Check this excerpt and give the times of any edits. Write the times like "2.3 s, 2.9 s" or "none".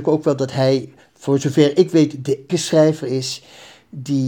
2.5 s